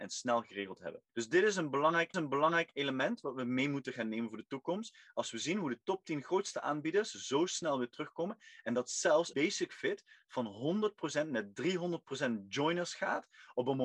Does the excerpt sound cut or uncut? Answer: cut